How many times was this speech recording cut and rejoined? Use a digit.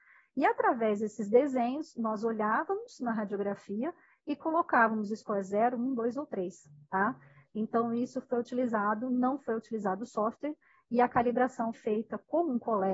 1